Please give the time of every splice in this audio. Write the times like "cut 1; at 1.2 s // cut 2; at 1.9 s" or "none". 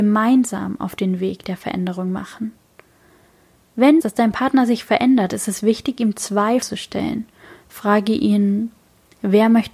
cut 1; at 4.0 s // cut 2; at 6.6 s